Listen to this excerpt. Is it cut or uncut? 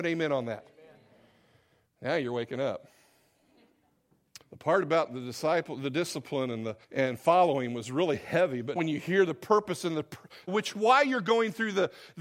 cut